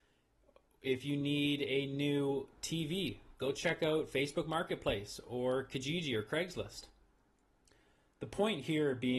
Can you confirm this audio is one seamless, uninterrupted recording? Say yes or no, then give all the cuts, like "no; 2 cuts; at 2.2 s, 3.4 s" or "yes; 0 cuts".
yes; 0 cuts